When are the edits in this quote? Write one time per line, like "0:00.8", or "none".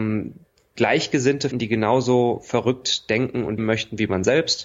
0:01.5
0:03.6